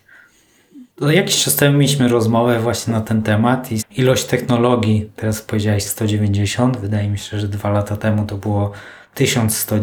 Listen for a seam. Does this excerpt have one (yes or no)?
yes